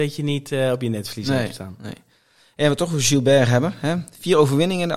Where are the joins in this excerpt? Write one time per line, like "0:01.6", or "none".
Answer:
none